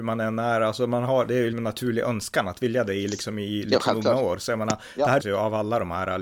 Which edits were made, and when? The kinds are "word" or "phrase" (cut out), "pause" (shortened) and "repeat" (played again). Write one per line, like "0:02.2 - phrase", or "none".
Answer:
0:01.5 - word
0:05.2 - word